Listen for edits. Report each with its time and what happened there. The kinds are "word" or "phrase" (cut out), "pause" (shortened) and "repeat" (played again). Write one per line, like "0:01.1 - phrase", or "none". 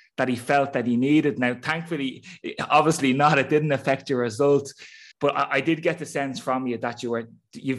0:05.1 - pause

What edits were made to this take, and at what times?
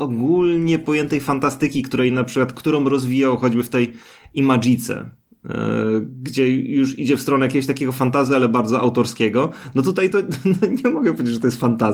none

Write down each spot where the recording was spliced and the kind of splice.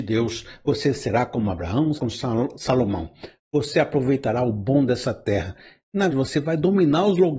0:02.0 - word
0:06.1 - word

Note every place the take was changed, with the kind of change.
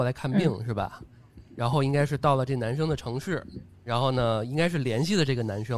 none

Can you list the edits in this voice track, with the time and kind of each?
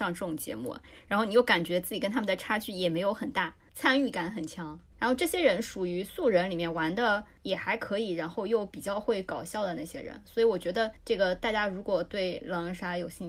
0:11.0 - pause

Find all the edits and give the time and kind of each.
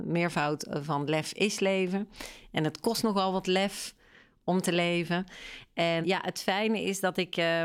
0:06.0 - word

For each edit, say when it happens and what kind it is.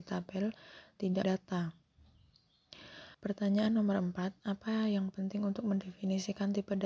0:01.2 - phrase
0:03.1 - pause

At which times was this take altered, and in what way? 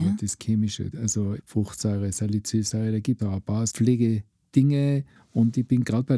0:00.9 - word
0:01.4 - word
0:03.2 - word
0:03.7 - word

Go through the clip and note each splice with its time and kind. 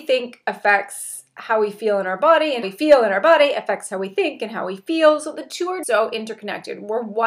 0:02.6 - word
0:05.8 - word

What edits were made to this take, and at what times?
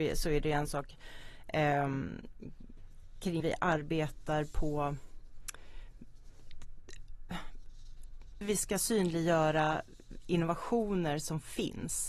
0:03.4 - word
0:08.4 - word

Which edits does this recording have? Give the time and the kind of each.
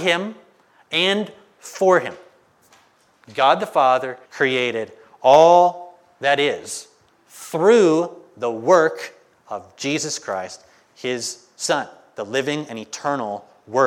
0:04.3 - pause

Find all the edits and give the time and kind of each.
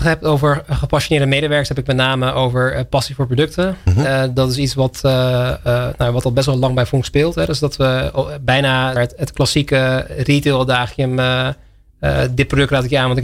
0:09.0 - phrase

